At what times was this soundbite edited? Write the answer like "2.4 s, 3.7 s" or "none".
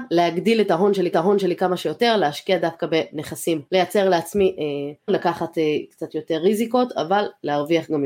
1.1 s, 3.7 s, 5.1 s